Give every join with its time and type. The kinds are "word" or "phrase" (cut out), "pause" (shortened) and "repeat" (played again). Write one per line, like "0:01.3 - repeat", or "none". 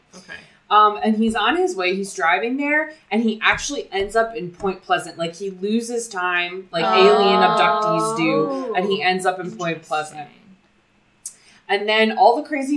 none